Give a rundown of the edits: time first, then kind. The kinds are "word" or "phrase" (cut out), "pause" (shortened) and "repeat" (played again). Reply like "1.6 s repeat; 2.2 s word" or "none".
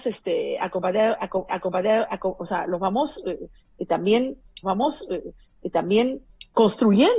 1.5 s repeat; 4.6 s repeat

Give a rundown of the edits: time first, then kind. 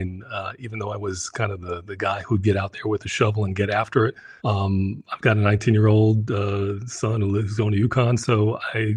4.4 s pause

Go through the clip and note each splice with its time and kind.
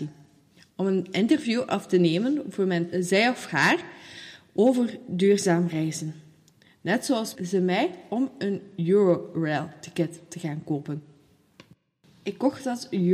2.9 s word; 7.3 s phrase

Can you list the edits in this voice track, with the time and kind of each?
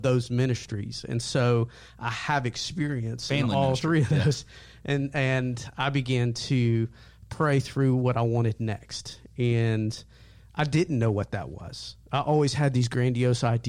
none

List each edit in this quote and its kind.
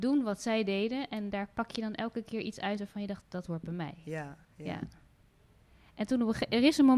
3.2 s word; 4.4 s pause

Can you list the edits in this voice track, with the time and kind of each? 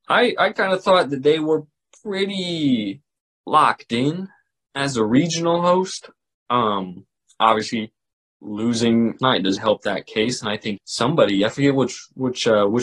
9.2 s word; 9.6 s word; 10.8 s word

